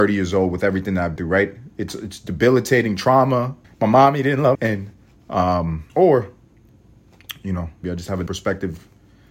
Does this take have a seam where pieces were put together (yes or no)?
yes